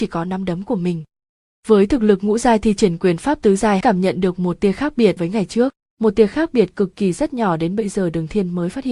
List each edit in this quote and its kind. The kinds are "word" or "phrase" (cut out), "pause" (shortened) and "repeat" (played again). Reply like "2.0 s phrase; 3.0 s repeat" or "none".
3.8 s word; 5.2 s word